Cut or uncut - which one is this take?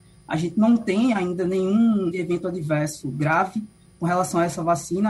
cut